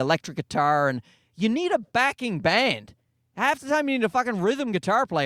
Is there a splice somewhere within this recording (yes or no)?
no